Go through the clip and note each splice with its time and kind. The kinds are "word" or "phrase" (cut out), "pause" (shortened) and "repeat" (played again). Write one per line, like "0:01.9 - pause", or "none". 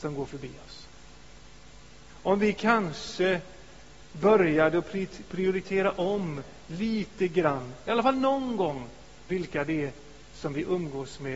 none